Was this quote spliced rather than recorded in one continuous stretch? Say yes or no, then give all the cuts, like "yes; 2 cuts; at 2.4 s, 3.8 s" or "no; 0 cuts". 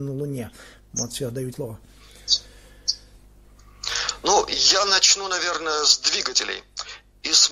yes; 1 cut; at 1.5 s